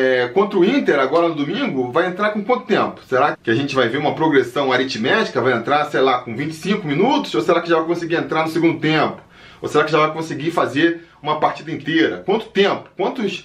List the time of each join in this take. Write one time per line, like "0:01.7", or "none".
0:03.3